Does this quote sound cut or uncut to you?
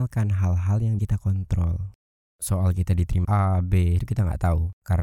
cut